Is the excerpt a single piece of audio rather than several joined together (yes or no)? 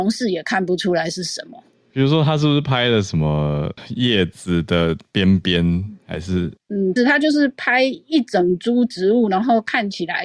no